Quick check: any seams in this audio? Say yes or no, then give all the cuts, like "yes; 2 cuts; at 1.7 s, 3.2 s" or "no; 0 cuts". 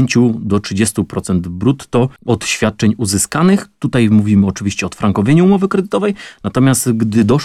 yes; 1 cut; at 2.2 s